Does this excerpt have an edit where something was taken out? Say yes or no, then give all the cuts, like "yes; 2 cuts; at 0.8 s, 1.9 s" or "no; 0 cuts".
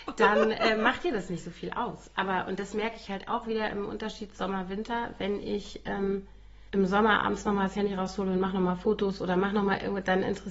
yes; 1 cut; at 6.7 s